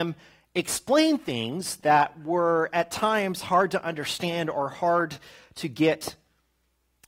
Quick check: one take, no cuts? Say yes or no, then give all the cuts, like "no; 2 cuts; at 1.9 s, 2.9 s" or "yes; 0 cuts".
yes; 0 cuts